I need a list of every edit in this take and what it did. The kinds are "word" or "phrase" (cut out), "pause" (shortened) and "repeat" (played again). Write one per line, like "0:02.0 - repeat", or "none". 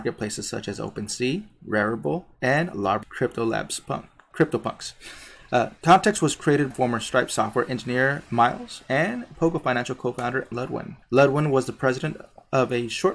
0:03.0 - word
0:04.3 - word
0:05.8 - pause
0:06.7 - word
0:08.3 - word
0:09.3 - phrase
0:10.5 - word
0:11.0 - pause